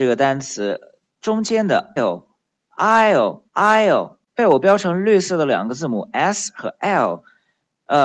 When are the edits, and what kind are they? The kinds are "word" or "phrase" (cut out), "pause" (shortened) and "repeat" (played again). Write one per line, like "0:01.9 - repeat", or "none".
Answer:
0:02.0 - word
0:03.5 - pause
0:04.3 - pause